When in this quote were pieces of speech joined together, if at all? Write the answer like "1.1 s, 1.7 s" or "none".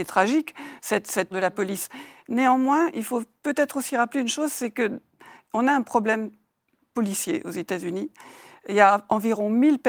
1.3 s